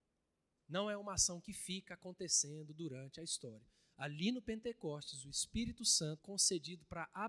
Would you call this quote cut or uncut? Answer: cut